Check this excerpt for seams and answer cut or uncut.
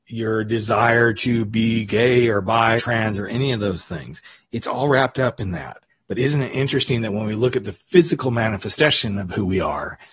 cut